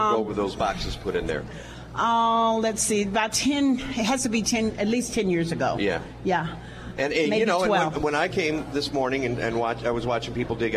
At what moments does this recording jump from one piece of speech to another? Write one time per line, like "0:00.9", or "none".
none